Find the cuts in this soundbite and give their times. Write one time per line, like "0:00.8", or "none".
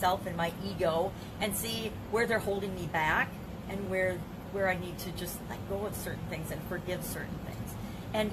none